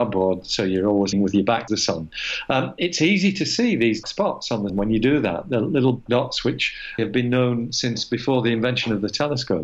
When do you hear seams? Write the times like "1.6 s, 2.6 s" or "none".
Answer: 1.1 s, 1.7 s, 4.0 s, 4.7 s, 6.1 s, 7.0 s